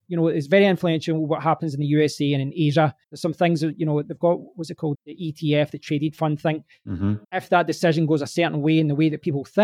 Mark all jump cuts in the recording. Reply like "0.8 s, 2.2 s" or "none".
3.0 s, 4.9 s, 7.2 s